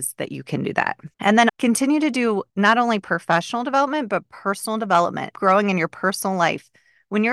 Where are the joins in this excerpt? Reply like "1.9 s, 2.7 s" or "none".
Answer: 1.1 s, 1.5 s, 2.5 s, 5.3 s